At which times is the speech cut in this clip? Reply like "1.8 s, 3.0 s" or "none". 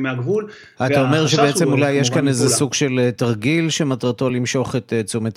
none